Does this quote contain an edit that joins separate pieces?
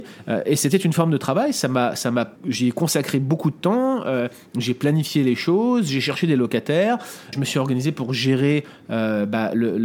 yes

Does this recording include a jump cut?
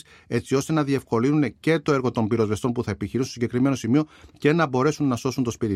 no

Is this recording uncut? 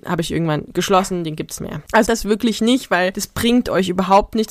no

